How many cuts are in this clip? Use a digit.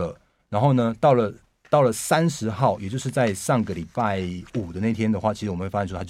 1